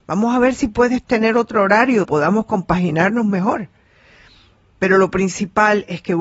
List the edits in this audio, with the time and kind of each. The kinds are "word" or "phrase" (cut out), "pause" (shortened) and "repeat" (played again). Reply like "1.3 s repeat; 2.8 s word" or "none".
2.0 s word